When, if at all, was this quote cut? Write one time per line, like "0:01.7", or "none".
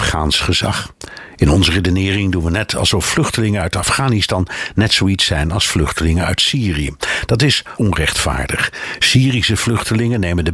0:07.8